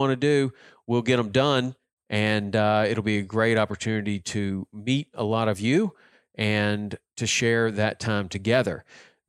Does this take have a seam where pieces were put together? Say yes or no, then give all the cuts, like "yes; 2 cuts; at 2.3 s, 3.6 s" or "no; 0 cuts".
no; 0 cuts